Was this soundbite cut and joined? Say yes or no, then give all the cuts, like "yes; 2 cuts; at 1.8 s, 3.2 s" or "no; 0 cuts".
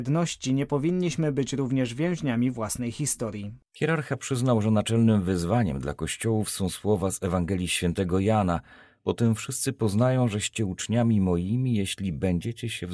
no; 0 cuts